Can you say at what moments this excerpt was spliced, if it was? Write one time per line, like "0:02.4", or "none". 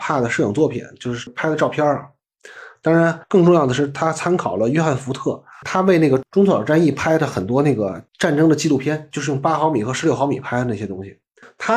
0:03.2
0:08.1

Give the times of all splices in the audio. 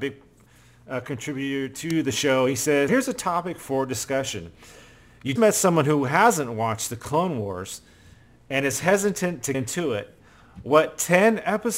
0:02.9
0:05.4
0:09.5

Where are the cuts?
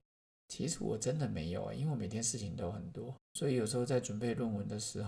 0:03.2

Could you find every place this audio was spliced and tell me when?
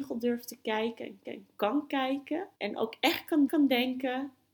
0:01.2
0:02.5
0:03.5

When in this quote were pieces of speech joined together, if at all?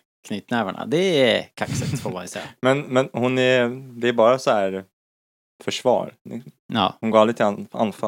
none

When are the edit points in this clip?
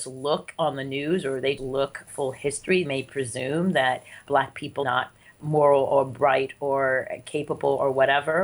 0:01.6
0:02.1
0:02.8
0:04.8

